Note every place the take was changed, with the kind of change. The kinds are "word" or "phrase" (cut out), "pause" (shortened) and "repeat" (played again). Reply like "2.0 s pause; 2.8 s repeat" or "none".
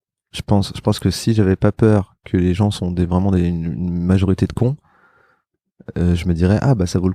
none